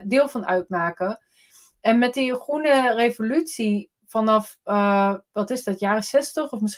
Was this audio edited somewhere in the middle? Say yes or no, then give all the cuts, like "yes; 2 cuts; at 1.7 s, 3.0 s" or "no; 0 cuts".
no; 0 cuts